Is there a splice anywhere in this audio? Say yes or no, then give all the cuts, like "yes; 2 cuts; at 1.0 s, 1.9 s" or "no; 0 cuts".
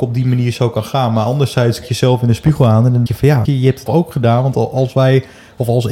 yes; 4 cuts; at 1.8 s, 3.1 s, 3.4 s, 3.9 s